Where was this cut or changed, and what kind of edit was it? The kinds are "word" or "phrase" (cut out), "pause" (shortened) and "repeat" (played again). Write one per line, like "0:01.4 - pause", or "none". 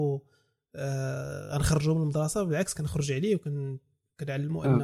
none